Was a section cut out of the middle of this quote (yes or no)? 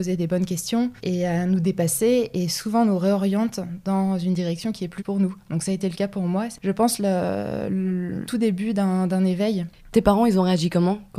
yes